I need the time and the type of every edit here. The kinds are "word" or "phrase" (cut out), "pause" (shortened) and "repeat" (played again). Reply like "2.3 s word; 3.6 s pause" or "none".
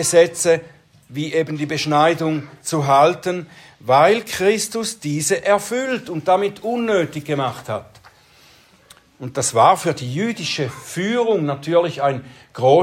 none